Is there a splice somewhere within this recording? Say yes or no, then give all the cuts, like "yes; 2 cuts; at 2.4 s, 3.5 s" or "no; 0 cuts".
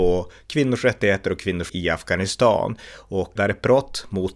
yes; 2 cuts; at 1.7 s, 3.4 s